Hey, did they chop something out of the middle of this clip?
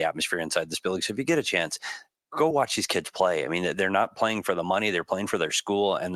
no; 0 cuts

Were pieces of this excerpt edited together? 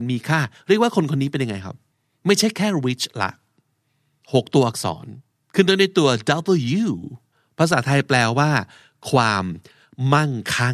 yes; 3 cuts; at 1.9 s, 5.3 s, 7.3 s

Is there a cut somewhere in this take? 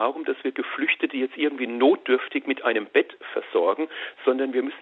no; 0 cuts

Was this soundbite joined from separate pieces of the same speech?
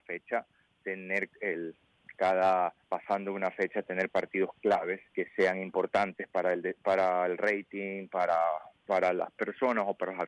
yes; 2 cuts; at 2.8 s, 5.1 s

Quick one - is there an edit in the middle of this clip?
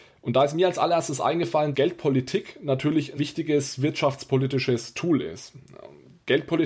yes; 2 cuts; at 1.7 s, 3.2 s

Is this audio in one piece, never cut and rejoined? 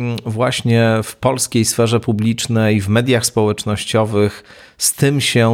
yes; 0 cuts

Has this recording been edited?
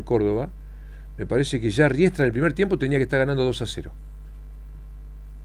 no; 0 cuts

